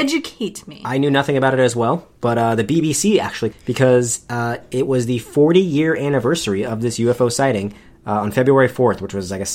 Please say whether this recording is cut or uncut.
cut